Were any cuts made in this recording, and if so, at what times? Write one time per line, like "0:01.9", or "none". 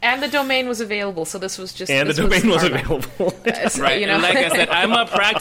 none